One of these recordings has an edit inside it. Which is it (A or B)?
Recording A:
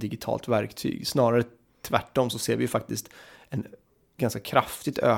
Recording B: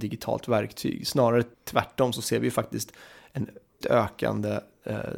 B